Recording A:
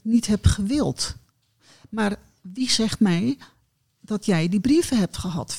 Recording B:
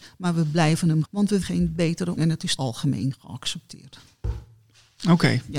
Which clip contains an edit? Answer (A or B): B